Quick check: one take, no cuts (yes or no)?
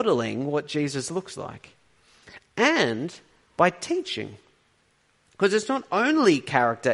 yes